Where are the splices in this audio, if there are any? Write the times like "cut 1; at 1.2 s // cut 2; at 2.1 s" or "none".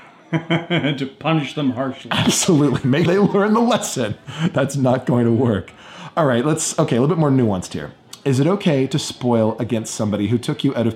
cut 1; at 3.1 s